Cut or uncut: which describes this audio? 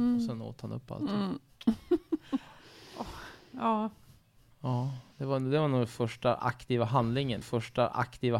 cut